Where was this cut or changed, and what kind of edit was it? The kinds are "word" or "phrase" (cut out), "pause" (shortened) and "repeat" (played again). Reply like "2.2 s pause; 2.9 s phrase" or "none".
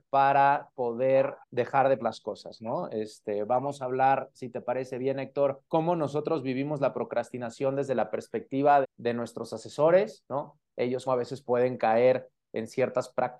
1.4 s pause; 2.0 s word; 5.7 s pause; 8.8 s word; 11.1 s word